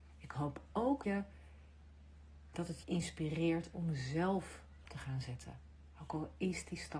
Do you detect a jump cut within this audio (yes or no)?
yes